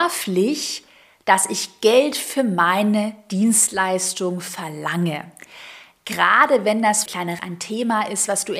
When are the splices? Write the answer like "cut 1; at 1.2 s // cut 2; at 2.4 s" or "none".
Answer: cut 1; at 7.1 s // cut 2; at 7.4 s